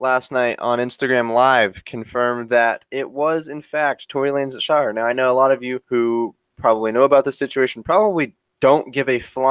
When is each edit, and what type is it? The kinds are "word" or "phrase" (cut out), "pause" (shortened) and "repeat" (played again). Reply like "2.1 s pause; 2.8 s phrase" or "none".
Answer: 5.8 s pause

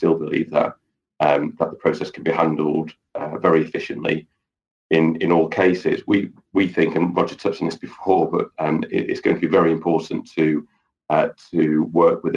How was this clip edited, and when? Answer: none

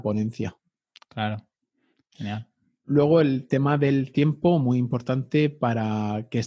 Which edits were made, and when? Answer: none

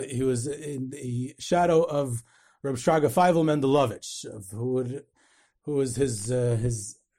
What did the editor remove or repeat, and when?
none

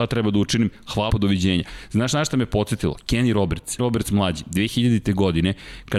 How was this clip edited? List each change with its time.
1.1 s word; 3.8 s word

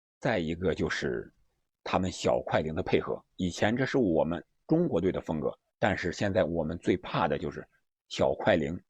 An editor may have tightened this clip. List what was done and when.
5.7 s pause

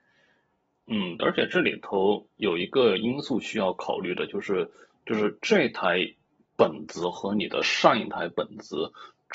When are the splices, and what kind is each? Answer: 1.2 s word

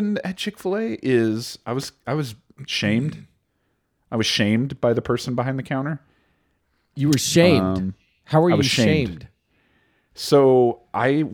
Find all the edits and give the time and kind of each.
none

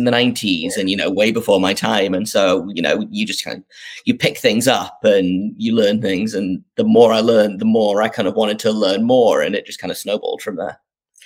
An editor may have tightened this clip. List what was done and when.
none

